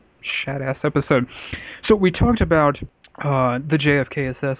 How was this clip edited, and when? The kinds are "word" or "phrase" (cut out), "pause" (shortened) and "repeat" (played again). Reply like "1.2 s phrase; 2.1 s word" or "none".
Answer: none